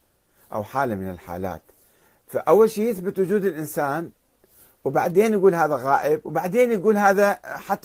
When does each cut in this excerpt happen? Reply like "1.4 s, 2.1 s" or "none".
none